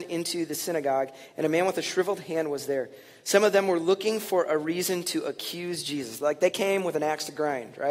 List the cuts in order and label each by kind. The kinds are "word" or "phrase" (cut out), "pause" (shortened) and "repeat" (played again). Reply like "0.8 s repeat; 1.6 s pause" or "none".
none